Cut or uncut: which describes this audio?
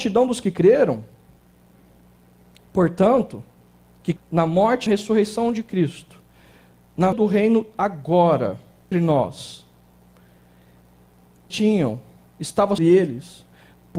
cut